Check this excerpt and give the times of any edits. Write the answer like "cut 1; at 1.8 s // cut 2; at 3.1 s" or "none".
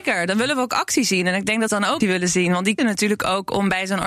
cut 1; at 1.7 s // cut 2; at 2.0 s // cut 3; at 2.8 s